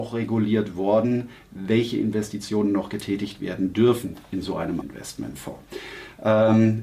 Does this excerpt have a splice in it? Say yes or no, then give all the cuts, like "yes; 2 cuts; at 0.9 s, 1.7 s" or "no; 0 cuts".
yes; 1 cut; at 4.8 s